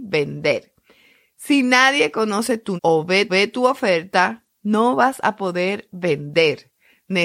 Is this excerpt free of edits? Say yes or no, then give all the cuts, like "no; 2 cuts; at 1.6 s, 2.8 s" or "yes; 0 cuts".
no; 2 cuts; at 2.8 s, 3.3 s